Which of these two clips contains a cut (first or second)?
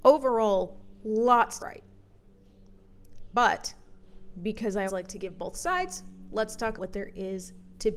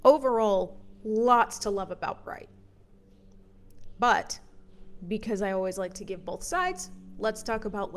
first